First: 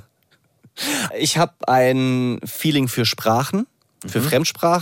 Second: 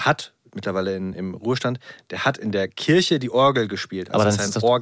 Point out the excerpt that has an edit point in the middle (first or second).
first